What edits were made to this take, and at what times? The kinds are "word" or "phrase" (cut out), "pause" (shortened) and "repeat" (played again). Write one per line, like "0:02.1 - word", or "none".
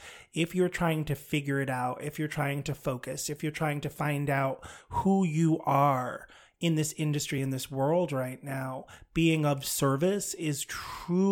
none